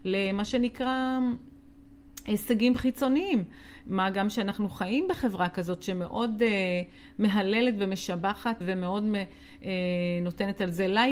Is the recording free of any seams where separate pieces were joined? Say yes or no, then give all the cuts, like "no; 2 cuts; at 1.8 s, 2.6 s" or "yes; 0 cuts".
no; 1 cut; at 8.6 s